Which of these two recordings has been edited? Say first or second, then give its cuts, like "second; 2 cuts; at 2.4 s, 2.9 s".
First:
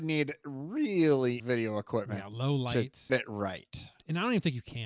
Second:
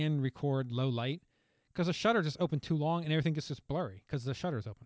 first; 2 cuts; at 1.4 s, 3.1 s